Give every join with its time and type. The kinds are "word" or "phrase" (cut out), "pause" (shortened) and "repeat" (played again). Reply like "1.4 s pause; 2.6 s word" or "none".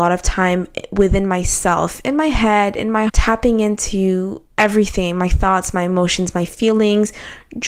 3.1 s word